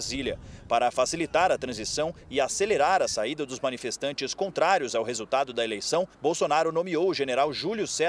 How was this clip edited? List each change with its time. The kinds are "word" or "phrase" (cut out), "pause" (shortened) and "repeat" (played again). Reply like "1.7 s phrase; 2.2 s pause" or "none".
6.1 s pause